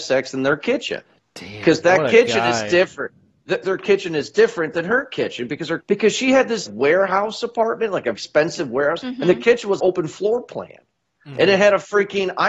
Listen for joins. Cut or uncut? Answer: cut